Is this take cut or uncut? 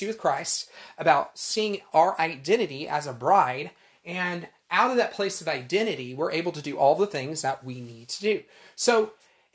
uncut